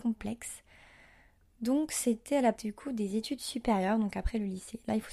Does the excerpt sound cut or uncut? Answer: cut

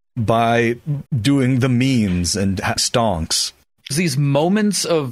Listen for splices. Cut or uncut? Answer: cut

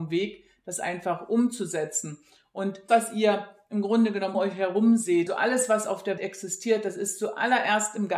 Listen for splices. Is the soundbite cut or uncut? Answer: cut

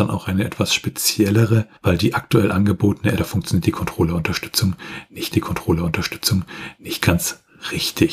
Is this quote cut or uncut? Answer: cut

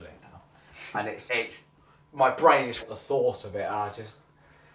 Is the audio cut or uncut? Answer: cut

